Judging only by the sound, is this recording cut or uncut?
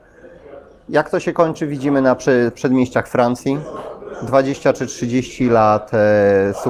uncut